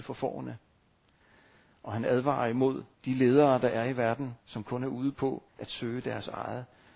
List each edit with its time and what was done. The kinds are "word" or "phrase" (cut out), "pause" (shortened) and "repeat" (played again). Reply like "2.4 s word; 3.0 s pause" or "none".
2.9 s pause; 4.4 s pause; 5.5 s pause